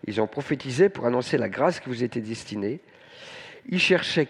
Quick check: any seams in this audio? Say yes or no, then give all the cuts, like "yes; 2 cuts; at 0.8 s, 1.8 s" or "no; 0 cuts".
no; 0 cuts